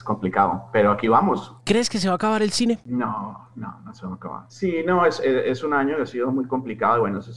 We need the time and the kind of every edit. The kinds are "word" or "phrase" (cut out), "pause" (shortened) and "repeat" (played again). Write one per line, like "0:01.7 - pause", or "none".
0:01.6 - pause